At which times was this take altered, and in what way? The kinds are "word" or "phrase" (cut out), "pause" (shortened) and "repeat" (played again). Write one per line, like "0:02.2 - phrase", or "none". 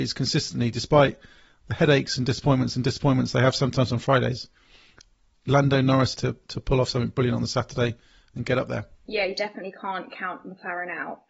0:02.7 - repeat
0:06.1 - phrase
0:08.9 - pause